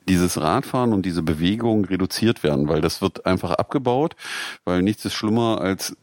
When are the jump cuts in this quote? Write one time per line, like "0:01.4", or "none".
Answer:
none